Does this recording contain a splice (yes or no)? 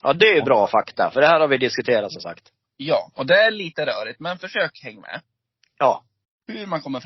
no